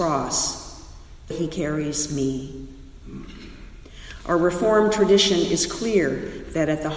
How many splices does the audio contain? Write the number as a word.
one